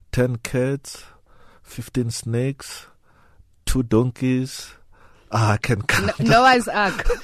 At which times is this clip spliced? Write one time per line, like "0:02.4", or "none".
none